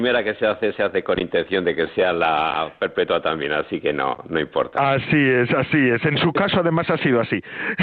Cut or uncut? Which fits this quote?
uncut